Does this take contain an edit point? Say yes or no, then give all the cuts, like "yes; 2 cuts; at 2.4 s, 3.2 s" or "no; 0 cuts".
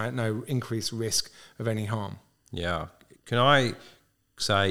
no; 0 cuts